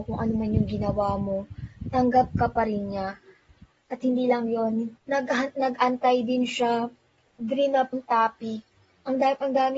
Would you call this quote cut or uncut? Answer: cut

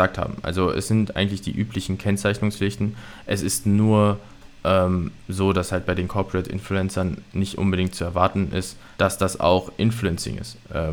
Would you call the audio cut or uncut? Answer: cut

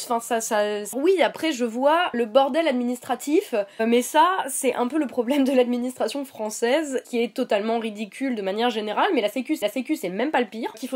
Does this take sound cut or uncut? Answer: cut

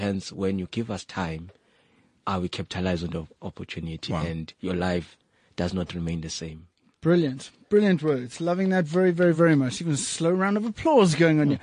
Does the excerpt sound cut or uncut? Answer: uncut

